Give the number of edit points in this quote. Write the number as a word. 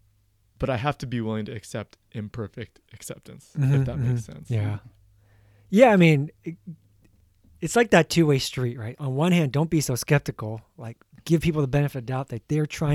zero